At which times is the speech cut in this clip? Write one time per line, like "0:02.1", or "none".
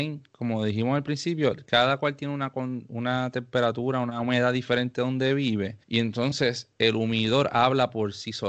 0:05.8

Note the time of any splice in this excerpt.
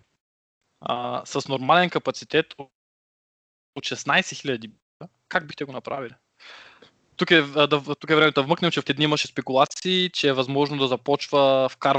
0:08.9

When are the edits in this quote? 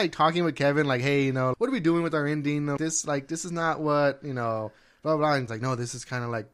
0:01.5
0:02.8
0:05.5

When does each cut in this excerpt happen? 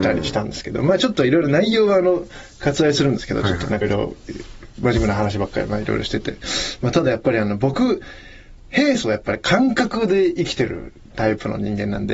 0:03.8

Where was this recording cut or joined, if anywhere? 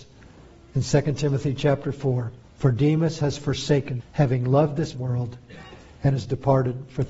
0:02.4
0:04.0
0:04.9

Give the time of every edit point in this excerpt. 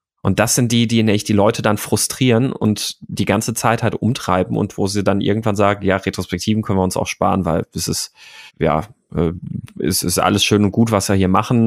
0:08.5

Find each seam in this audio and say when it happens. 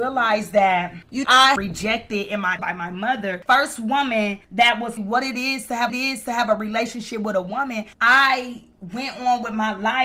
0:01.2
0:01.6
0:02.6
0:05.0
0:05.9

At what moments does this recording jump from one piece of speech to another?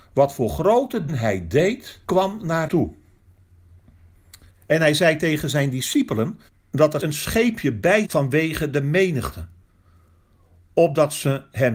0:01.1
0:02.0
0:02.7
0:04.5
0:06.5
0:07.0
0:08.0

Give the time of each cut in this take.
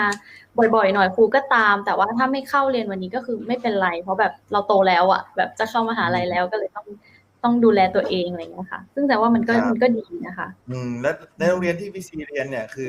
0:04.4
0:10.6
0:11.3

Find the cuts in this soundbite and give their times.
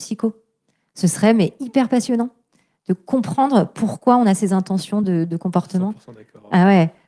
none

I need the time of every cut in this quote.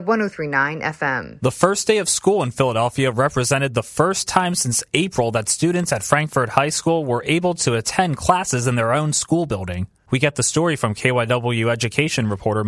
none

